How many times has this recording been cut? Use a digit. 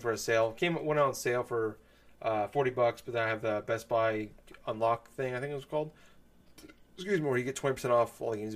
0